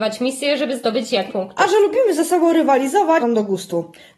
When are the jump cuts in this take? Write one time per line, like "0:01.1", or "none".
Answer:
0:01.3
0:03.2